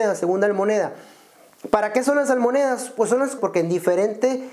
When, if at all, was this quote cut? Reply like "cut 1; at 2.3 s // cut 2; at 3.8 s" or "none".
cut 1; at 3.4 s

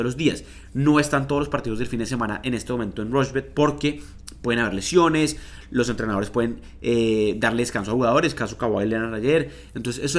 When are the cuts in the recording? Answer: none

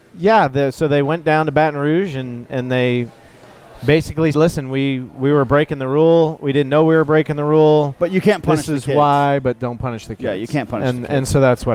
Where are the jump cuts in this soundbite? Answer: cut 1; at 4.3 s

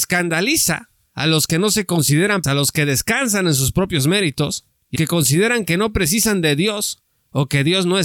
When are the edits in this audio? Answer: cut 1; at 2.4 s // cut 2; at 5.0 s

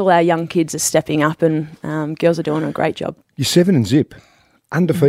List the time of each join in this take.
none

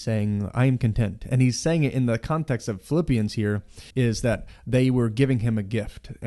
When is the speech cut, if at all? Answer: cut 1; at 3.9 s

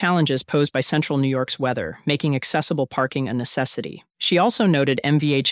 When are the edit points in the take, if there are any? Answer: cut 1; at 4.1 s

